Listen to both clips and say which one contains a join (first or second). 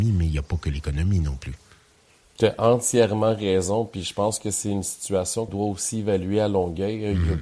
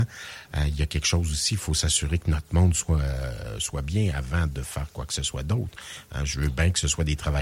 first